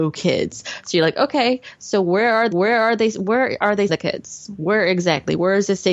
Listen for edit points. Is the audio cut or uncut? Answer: cut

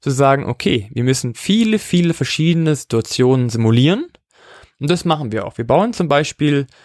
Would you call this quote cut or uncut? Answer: uncut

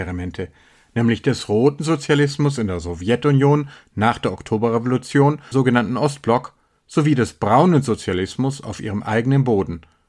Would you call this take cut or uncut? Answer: cut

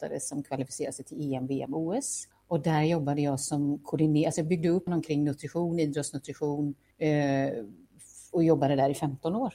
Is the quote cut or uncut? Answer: cut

